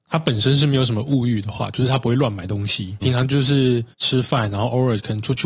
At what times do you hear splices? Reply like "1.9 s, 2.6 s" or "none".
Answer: 3.0 s, 3.9 s